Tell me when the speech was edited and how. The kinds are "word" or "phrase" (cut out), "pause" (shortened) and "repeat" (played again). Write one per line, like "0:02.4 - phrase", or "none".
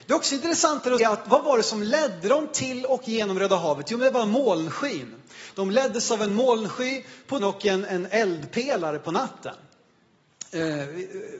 0:01.0 - word
0:07.4 - word
0:07.9 - word